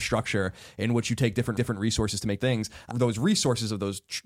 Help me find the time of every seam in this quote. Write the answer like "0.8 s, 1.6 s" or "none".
1.6 s, 2.4 s, 2.9 s